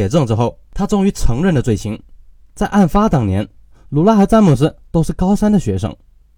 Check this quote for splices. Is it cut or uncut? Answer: uncut